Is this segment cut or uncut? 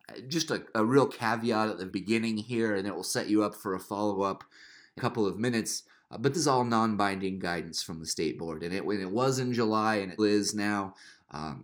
cut